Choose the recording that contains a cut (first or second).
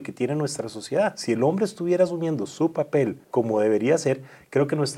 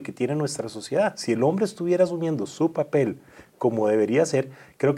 first